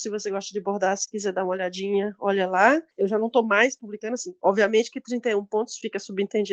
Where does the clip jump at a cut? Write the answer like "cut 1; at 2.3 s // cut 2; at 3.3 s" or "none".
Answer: none